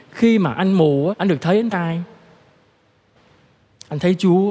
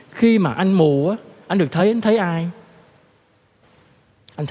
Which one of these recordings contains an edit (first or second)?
first